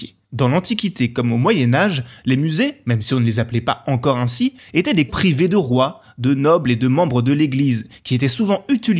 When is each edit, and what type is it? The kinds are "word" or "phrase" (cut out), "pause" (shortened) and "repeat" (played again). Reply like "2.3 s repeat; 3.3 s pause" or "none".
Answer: 5.1 s word